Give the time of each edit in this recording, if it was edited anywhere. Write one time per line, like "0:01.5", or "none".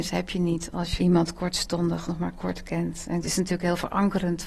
0:01.0
0:02.0
0:03.2